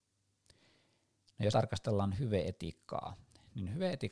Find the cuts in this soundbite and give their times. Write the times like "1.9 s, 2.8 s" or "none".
1.5 s